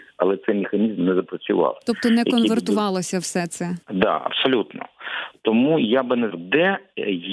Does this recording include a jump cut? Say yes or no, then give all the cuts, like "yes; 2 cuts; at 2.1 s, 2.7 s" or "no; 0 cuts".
yes; 2 cuts; at 3.8 s, 6.3 s